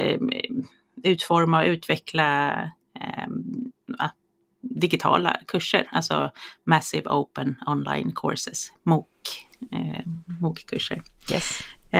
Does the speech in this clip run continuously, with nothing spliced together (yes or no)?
yes